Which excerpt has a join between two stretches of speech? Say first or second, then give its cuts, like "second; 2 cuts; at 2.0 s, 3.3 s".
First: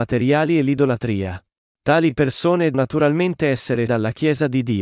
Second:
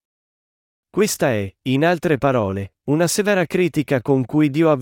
first; 3 cuts; at 1.6 s, 2.7 s, 3.9 s